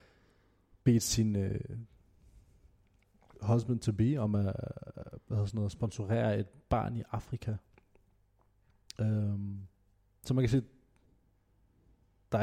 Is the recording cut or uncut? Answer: uncut